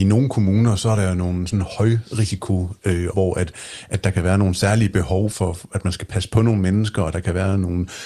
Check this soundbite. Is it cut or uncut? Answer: cut